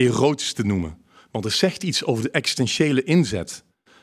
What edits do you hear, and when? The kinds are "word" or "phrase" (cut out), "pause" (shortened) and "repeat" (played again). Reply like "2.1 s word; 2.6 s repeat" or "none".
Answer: none